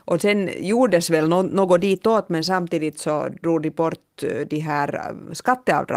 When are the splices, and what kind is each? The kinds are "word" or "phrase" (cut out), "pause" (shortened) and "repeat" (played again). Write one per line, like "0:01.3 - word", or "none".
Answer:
none